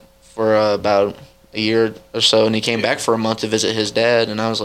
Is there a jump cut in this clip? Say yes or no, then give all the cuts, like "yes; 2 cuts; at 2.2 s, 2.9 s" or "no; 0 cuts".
no; 0 cuts